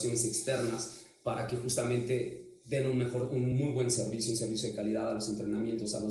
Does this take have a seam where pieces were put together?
no; 0 cuts

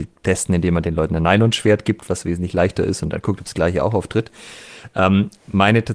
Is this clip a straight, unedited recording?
yes; 0 cuts

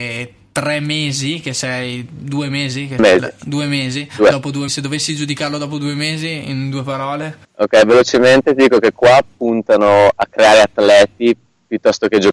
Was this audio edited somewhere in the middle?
yes; 3 cuts; at 3.0 s, 4.7 s, 7.4 s

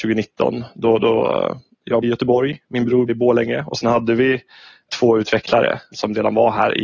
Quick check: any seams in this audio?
yes; 2 cuts; at 2.0 s, 3.1 s

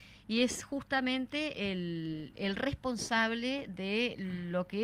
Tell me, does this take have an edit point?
no; 0 cuts

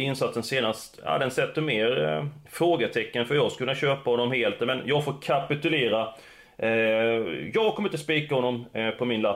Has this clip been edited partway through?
no; 0 cuts

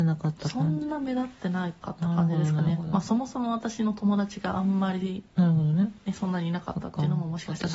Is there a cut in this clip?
no; 0 cuts

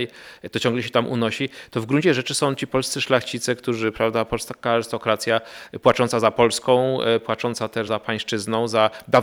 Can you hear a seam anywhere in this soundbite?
yes; 1 cut; at 7.9 s

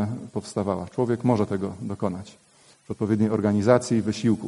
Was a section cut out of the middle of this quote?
no; 0 cuts

